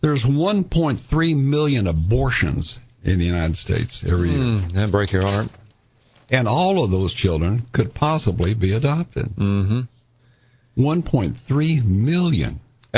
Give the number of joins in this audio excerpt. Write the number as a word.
zero